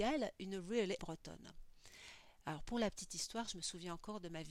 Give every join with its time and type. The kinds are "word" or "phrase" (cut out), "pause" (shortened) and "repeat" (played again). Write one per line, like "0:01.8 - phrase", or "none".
0:01.0 - word